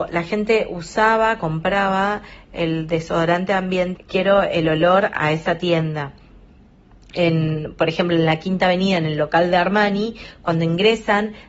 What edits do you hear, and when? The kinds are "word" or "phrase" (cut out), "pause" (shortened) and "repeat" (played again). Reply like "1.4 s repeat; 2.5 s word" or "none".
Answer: 4.0 s word; 5.2 s word